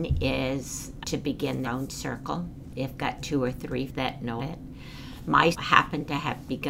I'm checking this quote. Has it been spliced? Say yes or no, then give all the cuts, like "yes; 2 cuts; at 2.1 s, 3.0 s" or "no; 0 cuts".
yes; 6 cuts; at 1.0 s, 1.6 s, 3.0 s, 3.9 s, 4.4 s, 5.5 s